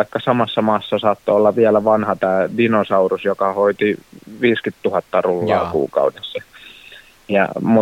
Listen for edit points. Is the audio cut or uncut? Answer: uncut